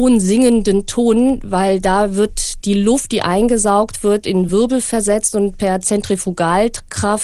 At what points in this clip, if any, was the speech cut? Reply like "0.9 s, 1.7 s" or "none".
none